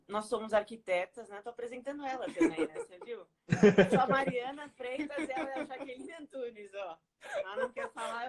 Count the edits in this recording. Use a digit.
0